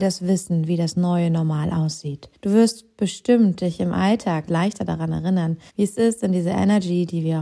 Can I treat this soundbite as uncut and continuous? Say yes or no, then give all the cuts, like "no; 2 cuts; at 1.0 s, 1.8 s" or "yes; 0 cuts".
no; 3 cuts; at 2.3 s, 4.5 s, 5.7 s